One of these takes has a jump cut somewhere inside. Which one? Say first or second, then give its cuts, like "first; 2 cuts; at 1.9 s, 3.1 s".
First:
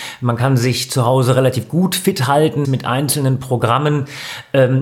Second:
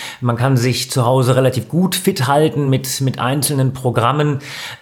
first; 1 cut; at 2.6 s